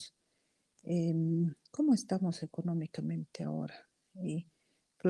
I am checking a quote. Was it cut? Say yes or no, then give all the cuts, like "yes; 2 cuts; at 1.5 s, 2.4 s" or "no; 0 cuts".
no; 0 cuts